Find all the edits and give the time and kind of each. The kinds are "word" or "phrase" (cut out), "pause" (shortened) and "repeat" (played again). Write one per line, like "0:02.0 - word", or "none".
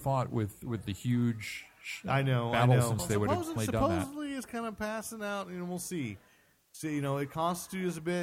0:03.0 - word
0:03.6 - word

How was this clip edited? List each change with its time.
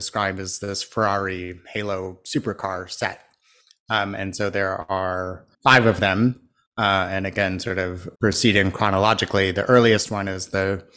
0:05.5 - pause
0:08.1 - pause

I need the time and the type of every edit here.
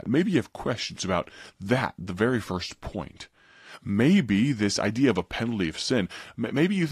none

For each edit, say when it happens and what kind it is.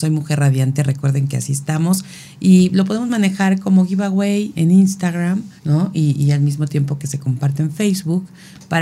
0:04.6 - word
0:05.6 - pause

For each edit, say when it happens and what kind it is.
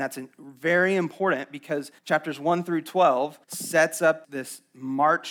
0:02.0 - pause
0:03.4 - pause
0:04.2 - word

